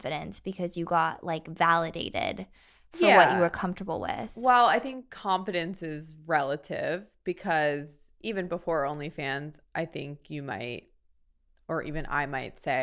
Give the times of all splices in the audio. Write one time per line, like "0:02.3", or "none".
none